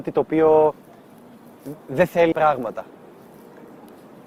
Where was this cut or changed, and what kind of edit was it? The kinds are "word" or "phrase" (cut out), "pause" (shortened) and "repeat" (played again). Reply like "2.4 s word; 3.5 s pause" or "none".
1.8 s pause; 2.3 s word